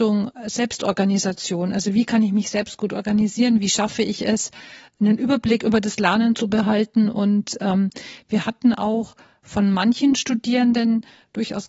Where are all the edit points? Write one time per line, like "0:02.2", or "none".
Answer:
none